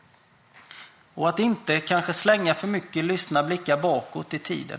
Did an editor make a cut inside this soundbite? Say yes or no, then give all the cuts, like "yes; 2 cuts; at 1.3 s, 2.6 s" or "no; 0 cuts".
no; 0 cuts